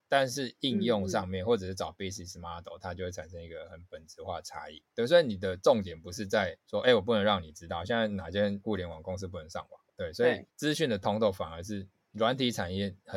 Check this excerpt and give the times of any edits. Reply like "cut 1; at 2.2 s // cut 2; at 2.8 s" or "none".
cut 1; at 4.9 s // cut 2; at 6.6 s // cut 3; at 9.9 s // cut 4; at 10.5 s

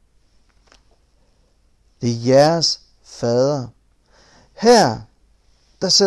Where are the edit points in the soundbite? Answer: none

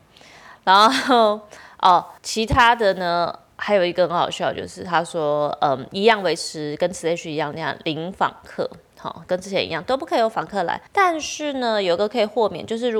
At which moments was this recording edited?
cut 1; at 2.2 s // cut 2; at 10.9 s

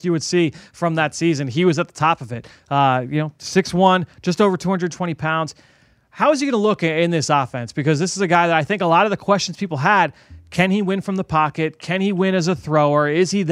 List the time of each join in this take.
none

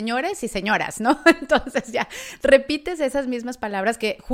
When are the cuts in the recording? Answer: none

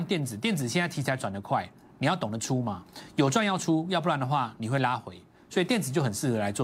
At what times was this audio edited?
none

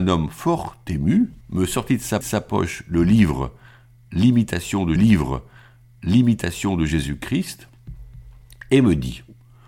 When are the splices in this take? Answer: cut 1; at 1.4 s // cut 2; at 2.2 s // cut 3; at 5.0 s

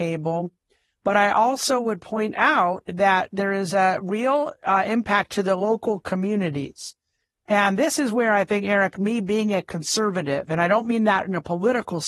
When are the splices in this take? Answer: none

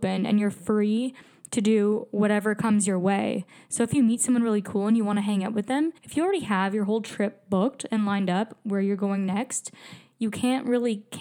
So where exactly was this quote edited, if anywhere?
cut 1; at 6.0 s

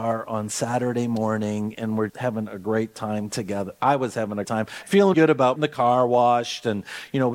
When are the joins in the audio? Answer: cut 1; at 2.1 s // cut 2; at 4.4 s // cut 3; at 5.1 s // cut 4; at 5.6 s

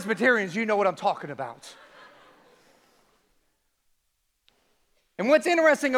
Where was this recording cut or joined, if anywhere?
none

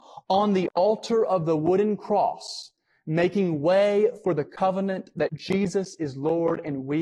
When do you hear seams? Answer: none

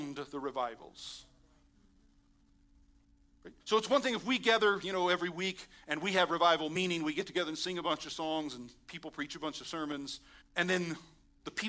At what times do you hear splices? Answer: cut 1; at 3.6 s // cut 2; at 10.4 s

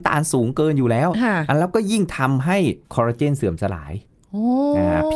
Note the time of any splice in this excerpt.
cut 1; at 2.8 s

